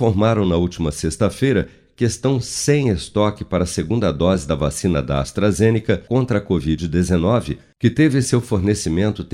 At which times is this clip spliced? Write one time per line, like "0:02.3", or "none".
none